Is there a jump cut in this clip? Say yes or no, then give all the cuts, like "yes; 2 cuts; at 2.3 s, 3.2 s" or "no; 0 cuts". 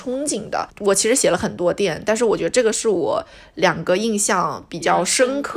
no; 0 cuts